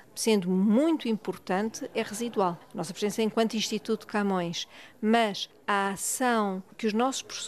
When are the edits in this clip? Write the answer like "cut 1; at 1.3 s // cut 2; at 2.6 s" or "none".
none